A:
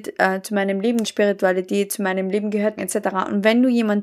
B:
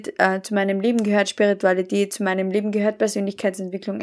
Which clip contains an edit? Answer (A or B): A